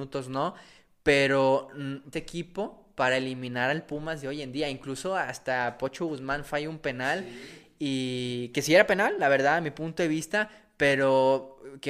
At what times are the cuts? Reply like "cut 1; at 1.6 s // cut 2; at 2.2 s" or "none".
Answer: cut 1; at 2.1 s